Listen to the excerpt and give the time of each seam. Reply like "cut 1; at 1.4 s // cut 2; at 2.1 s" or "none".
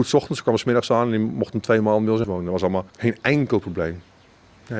cut 1; at 2.2 s // cut 2; at 2.9 s